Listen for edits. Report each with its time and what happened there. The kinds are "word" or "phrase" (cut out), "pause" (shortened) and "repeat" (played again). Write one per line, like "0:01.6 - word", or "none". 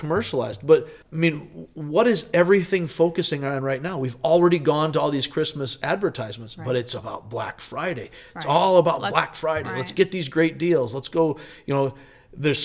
0:01.0 - pause

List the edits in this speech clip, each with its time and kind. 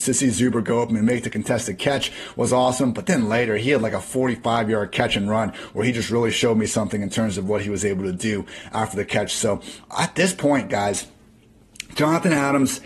none

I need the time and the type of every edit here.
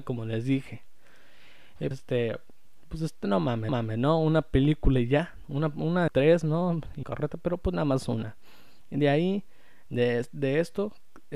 0:01.9 - word
0:03.7 - repeat
0:06.1 - phrase
0:07.0 - word

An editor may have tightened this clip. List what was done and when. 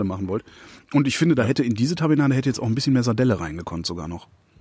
none

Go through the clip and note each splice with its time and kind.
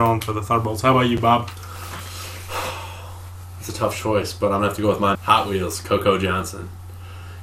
0:05.1 - word

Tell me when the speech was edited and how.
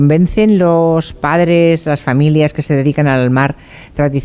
none

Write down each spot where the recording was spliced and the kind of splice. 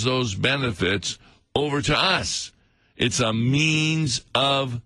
none

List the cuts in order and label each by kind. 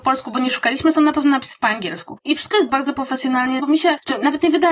0:02.7 - word
0:03.6 - word

